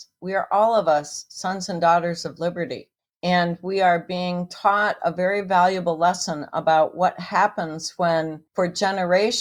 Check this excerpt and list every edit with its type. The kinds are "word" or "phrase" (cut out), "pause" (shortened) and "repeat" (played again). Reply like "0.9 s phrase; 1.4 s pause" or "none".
3.0 s pause; 8.5 s pause